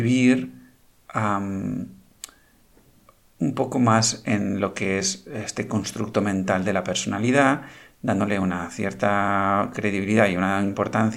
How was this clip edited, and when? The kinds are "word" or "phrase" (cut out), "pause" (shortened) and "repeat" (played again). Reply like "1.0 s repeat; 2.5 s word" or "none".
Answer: none